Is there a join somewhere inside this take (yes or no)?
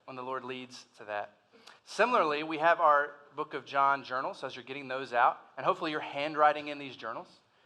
yes